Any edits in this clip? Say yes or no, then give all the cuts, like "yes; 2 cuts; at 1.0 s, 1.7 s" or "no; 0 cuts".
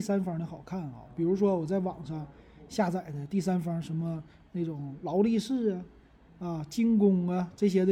no; 0 cuts